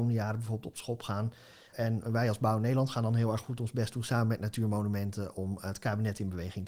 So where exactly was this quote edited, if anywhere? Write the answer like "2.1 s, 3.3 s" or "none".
none